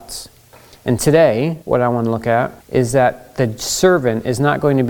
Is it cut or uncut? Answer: cut